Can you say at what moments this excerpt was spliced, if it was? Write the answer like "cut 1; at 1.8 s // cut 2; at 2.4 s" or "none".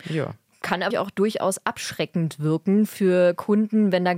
cut 1; at 0.9 s